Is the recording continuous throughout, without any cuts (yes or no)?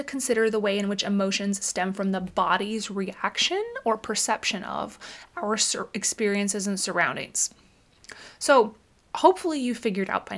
no